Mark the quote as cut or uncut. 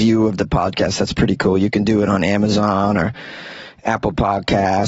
uncut